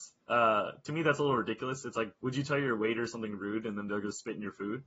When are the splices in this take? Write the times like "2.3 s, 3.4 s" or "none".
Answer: 2.2 s